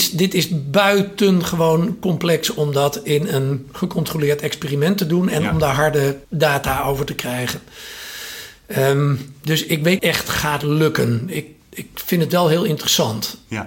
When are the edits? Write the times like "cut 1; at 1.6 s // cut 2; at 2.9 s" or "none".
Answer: cut 1; at 6.2 s // cut 2; at 10.0 s